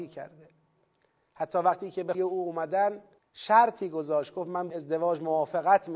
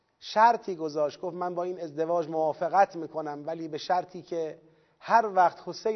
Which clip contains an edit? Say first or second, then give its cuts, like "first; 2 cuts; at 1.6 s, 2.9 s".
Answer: first; 3 cuts; at 2.1 s, 3.2 s, 4.7 s